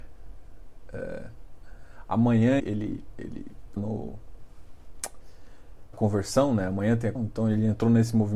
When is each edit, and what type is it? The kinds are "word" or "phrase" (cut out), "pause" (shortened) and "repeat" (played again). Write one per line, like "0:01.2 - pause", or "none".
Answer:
0:02.6 - word
0:03.8 - word
0:05.9 - word
0:07.2 - word